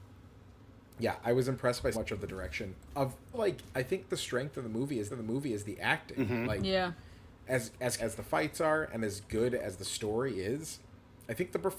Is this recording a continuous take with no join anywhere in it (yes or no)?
no